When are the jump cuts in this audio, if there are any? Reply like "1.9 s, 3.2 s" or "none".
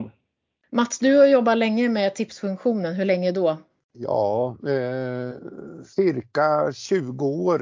3.8 s, 5.9 s